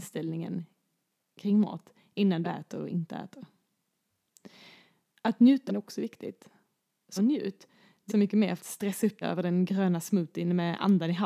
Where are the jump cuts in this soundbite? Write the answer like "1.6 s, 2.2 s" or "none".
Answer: 2.4 s, 5.7 s, 7.2 s, 8.1 s, 8.6 s, 9.2 s